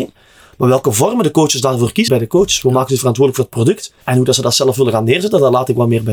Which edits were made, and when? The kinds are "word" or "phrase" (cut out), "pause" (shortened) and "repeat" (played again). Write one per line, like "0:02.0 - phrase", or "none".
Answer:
0:02.1 - word
0:04.0 - pause